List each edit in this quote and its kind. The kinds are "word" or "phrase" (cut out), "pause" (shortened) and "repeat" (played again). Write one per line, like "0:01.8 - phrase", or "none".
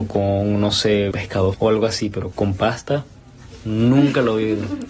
0:01.1 - word
0:01.5 - word
0:02.3 - word